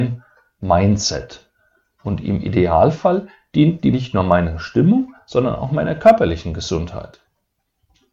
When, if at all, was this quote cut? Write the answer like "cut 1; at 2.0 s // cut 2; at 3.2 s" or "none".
cut 1; at 3.9 s